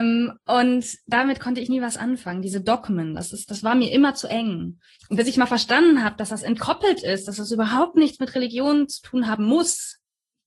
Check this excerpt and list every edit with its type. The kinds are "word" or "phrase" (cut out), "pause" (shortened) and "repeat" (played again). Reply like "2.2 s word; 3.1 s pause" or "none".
5.0 s pause